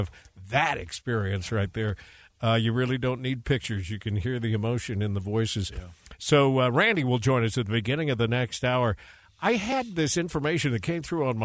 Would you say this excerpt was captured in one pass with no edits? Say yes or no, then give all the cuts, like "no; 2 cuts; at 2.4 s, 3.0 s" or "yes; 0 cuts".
yes; 0 cuts